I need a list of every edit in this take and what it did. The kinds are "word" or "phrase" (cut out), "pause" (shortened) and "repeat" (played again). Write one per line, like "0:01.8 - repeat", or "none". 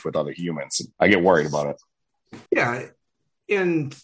0:00.9 - pause
0:02.5 - pause